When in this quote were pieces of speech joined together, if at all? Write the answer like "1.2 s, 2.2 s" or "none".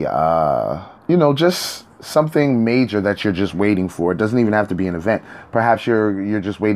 1.0 s